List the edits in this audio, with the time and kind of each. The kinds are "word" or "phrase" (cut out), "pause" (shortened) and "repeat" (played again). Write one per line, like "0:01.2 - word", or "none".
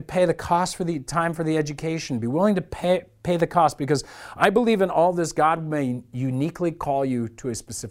none